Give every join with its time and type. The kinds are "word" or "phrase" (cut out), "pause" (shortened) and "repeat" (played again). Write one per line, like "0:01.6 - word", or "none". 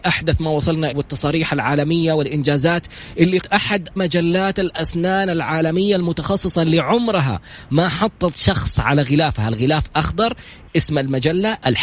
0:00.9 - word
0:03.4 - word
0:04.0 - word
0:08.3 - word